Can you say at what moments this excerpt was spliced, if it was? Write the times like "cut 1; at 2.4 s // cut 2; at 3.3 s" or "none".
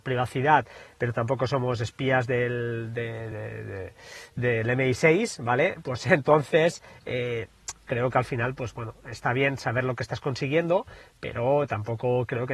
none